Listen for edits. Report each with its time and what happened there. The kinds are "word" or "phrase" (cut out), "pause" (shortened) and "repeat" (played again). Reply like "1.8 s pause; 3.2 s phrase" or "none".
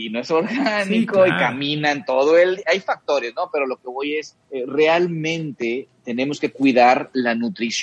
2.6 s word; 4.4 s pause

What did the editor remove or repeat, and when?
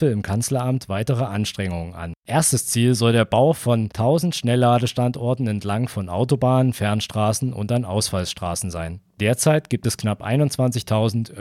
9.1 s pause

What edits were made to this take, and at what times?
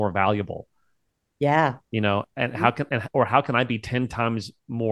1.8 s pause

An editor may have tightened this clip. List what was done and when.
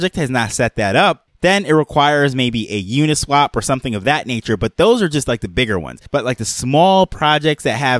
6.1 s pause

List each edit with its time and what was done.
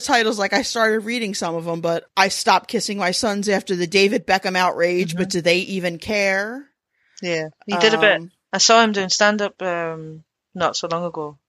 2.1 s word

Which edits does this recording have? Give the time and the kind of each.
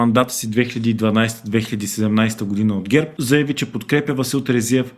none

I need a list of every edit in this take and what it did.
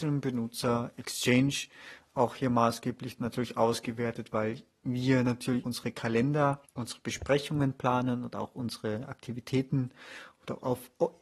5.6 s word; 6.7 s pause

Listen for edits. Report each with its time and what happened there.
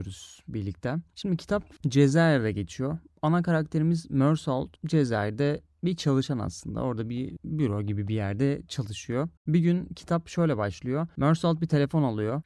1.8 s pause; 4.8 s pause; 9.4 s pause

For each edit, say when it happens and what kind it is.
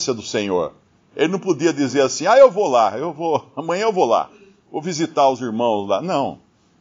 none

